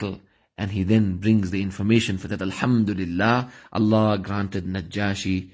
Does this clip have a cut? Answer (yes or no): yes